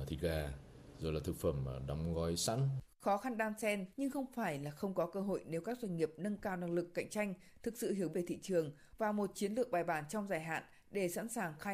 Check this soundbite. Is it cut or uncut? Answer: cut